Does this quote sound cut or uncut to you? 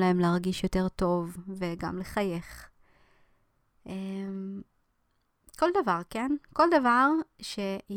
uncut